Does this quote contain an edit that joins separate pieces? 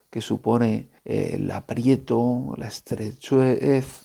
yes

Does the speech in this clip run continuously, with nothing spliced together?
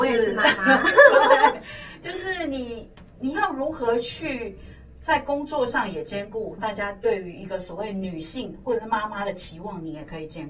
no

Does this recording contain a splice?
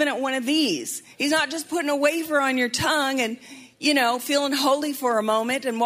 yes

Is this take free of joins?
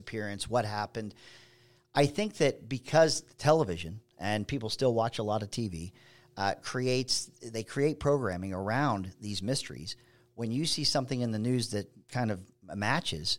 yes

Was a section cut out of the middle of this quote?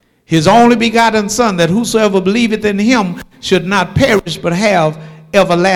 no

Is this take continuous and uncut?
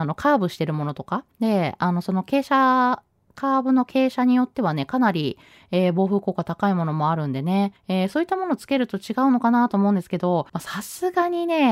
no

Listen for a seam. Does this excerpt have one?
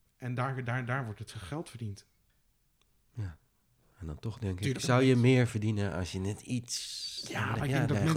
no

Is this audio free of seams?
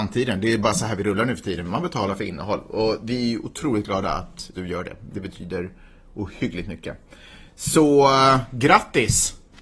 no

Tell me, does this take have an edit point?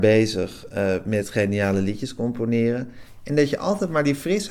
no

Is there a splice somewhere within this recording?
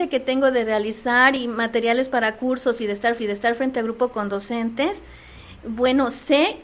yes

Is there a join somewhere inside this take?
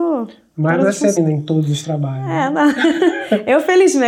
yes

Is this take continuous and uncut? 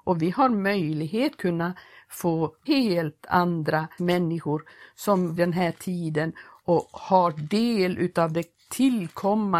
no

